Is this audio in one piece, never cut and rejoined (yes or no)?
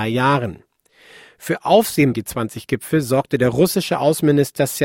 no